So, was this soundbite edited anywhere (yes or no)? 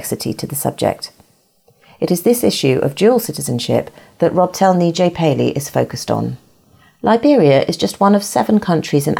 no